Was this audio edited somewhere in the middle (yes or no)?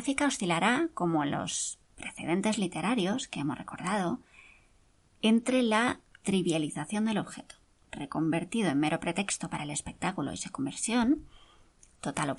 no